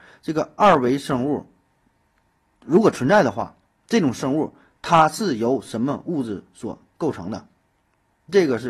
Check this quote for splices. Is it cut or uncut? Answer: uncut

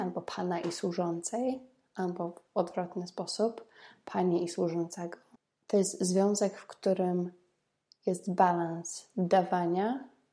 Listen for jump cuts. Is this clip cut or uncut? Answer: uncut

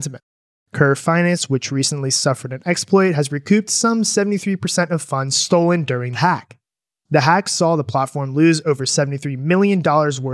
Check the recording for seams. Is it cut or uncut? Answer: cut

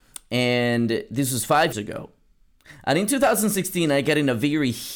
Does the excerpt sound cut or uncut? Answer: cut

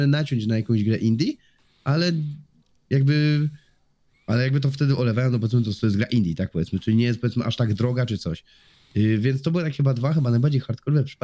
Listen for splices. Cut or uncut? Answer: uncut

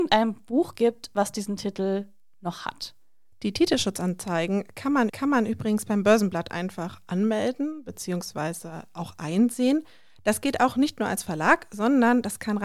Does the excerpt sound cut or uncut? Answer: cut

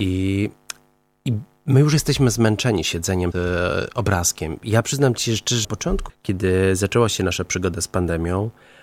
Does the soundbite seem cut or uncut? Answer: cut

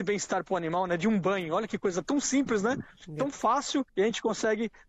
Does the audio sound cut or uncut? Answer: cut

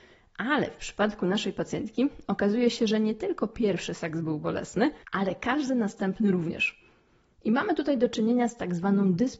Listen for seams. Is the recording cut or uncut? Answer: cut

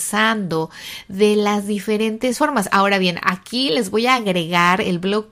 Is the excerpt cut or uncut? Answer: uncut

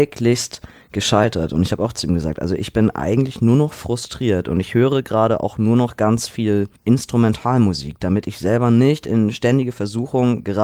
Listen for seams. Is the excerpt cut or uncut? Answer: cut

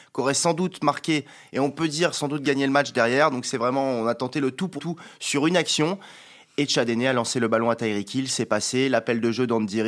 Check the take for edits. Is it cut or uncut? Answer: cut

